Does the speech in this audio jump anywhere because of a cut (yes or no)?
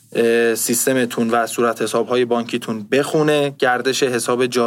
no